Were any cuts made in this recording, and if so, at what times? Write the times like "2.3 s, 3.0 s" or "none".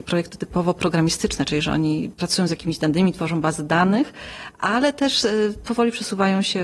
none